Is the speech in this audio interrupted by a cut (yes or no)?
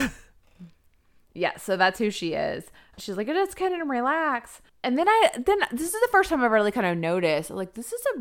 no